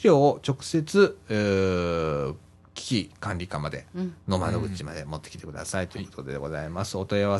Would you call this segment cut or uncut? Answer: uncut